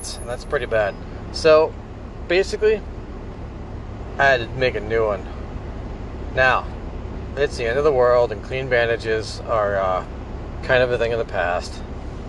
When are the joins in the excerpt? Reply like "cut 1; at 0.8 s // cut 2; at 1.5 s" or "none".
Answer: none